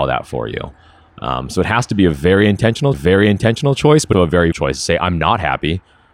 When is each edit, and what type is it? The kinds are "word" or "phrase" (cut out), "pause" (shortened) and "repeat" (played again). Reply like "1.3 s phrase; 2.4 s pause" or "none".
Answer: 2.9 s repeat; 4.1 s word; 4.5 s word